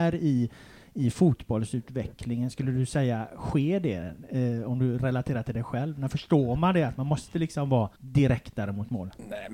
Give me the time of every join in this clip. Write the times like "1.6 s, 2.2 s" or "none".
7.9 s